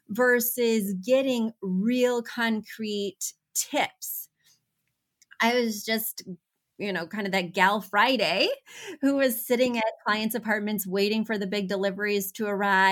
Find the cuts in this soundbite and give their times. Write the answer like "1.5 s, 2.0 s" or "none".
none